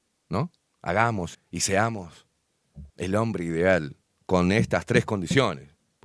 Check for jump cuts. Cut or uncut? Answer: cut